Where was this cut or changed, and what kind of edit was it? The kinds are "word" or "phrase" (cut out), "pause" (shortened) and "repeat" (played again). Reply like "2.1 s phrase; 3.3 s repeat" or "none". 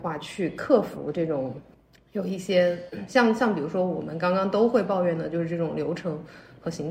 1.7 s pause